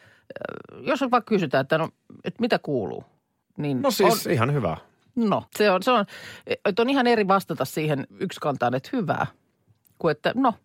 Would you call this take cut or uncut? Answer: cut